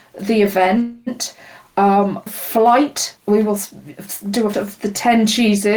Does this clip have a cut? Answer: yes; 3 cuts; at 2.3 s, 3.2 s, 4.5 s

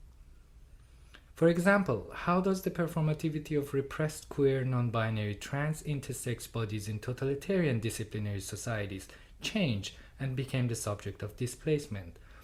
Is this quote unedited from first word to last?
yes; 0 cuts

